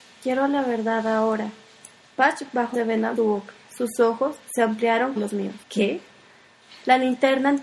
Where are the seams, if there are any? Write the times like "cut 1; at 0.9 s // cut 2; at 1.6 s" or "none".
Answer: cut 1; at 2.0 s // cut 2; at 2.7 s // cut 3; at 3.2 s // cut 4; at 4.4 s // cut 5; at 5.2 s // cut 6; at 5.6 s